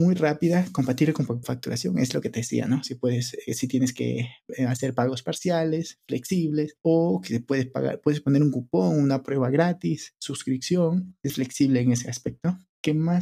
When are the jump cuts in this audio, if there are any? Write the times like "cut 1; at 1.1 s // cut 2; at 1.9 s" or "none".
cut 1; at 1.4 s // cut 2; at 11.3 s